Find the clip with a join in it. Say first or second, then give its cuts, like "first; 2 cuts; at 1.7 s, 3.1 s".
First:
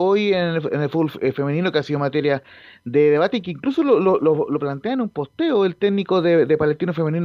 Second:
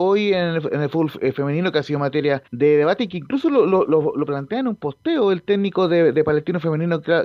second; 1 cut; at 2.5 s